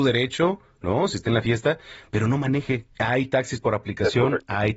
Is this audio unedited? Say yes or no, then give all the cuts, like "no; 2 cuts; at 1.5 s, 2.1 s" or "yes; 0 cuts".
no; 1 cut; at 2.9 s